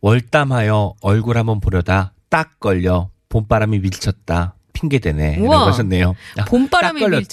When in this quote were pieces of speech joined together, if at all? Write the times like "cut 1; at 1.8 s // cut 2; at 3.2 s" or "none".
none

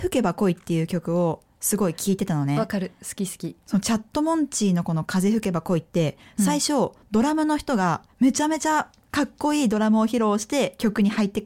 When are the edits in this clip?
cut 1; at 3.6 s // cut 2; at 8.1 s

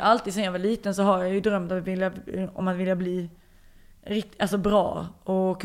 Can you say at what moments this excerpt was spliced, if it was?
none

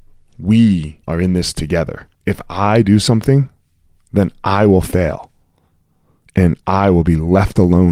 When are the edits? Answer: cut 1; at 1.0 s // cut 2; at 2.1 s

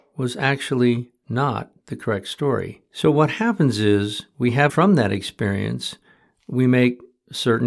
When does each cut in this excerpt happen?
cut 1; at 2.9 s // cut 2; at 4.7 s

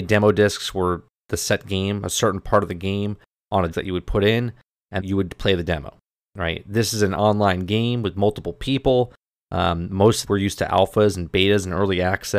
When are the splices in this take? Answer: cut 1; at 3.7 s // cut 2; at 5.0 s // cut 3; at 10.2 s

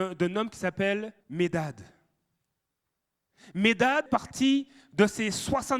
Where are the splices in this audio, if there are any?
cut 1; at 1.2 s // cut 2; at 4.1 s

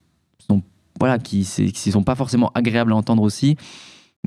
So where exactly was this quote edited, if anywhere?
none

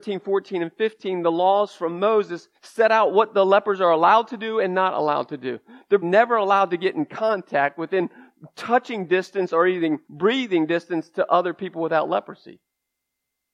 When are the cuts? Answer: cut 1; at 2.5 s // cut 2; at 6.0 s // cut 3; at 10.0 s

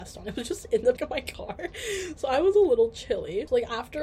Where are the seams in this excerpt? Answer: cut 1; at 1.0 s // cut 2; at 2.5 s

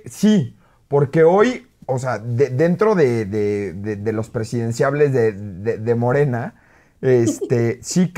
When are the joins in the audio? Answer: none

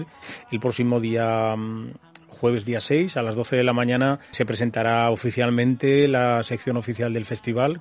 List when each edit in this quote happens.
cut 1; at 4.3 s

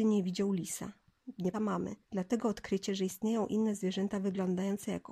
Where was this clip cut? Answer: cut 1; at 1.5 s // cut 2; at 2.0 s

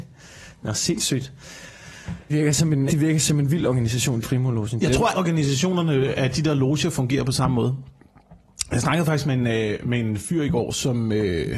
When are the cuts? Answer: cut 1; at 2.3 s // cut 2; at 2.9 s // cut 3; at 4.2 s // cut 4; at 5.1 s

